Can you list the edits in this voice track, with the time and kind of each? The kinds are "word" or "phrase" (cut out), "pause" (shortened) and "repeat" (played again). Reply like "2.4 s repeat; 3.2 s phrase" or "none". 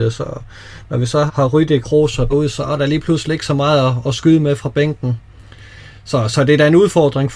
1.3 s word; 1.8 s word; 2.3 s word